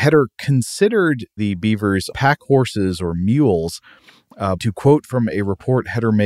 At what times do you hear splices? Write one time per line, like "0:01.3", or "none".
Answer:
0:01.4
0:02.1
0:04.6

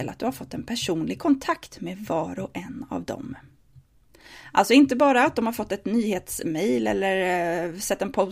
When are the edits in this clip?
none

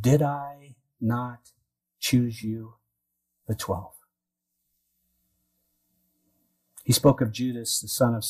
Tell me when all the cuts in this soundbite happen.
none

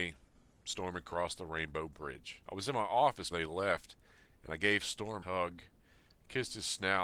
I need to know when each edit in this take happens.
0:02.4
0:03.3
0:05.2

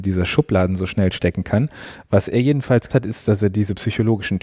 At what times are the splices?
0:02.9

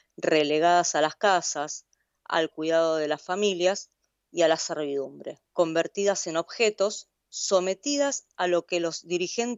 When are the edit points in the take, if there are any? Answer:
0:05.5

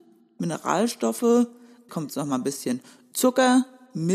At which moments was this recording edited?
0:01.9

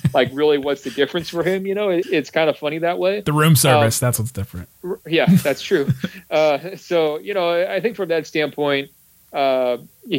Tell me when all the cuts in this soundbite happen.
0:02.0
0:04.7

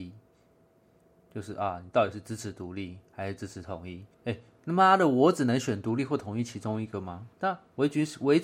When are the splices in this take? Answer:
0:04.1
0:07.3

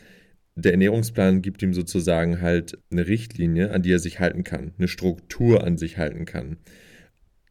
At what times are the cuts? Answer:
0:02.8
0:05.8

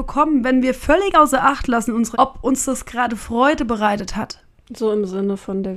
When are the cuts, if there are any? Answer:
0:02.1

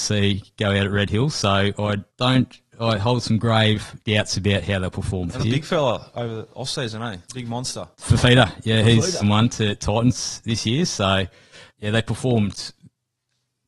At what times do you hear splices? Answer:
0:02.1
0:04.0
0:05.4
0:07.2
0:07.9
0:09.2
0:11.7

